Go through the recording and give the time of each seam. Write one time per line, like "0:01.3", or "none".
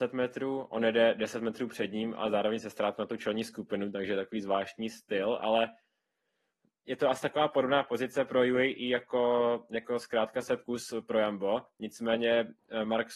none